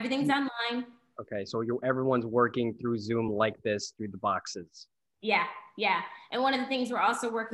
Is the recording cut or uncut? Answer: uncut